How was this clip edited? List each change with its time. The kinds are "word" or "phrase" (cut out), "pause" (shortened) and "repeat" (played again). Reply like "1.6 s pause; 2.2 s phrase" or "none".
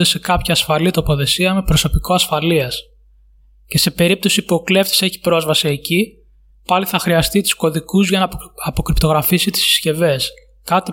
none